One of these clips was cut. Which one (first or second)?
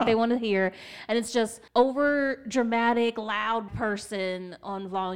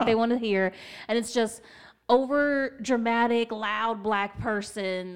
first